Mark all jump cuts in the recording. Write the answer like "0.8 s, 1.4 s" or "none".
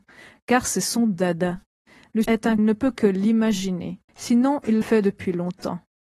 2.2 s, 2.6 s, 4.1 s, 4.8 s